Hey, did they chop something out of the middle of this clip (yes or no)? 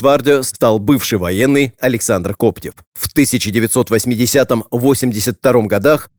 yes